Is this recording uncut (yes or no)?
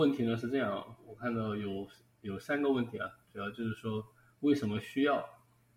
yes